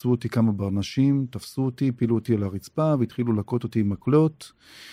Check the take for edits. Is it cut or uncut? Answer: uncut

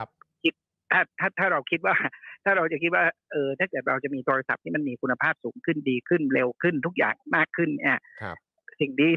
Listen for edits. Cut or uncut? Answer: cut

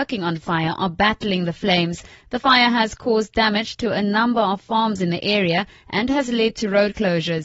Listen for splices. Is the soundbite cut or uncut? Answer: uncut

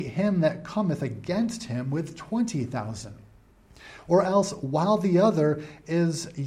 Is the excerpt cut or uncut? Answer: uncut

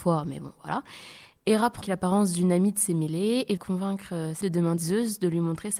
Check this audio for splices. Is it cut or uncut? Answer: cut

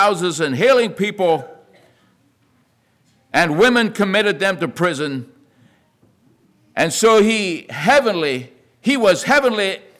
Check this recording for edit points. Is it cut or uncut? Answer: uncut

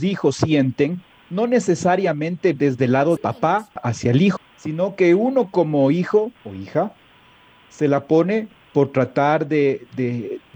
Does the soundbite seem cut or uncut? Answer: cut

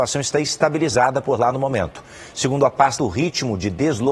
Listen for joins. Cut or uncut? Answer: cut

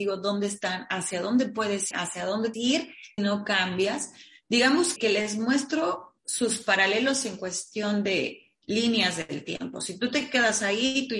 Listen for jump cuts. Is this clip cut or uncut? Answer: cut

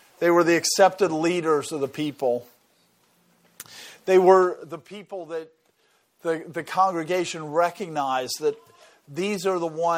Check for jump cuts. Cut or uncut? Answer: uncut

